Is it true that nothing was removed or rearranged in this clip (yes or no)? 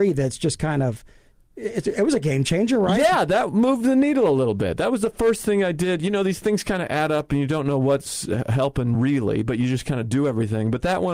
yes